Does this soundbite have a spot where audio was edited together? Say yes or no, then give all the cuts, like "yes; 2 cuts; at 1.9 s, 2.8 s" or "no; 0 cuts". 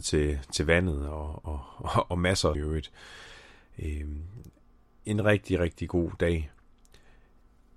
yes; 1 cut; at 2.5 s